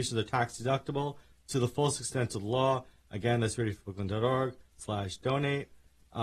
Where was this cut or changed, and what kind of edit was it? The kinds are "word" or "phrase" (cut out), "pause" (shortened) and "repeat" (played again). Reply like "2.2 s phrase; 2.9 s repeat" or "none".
none